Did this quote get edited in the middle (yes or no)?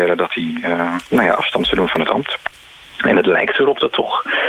no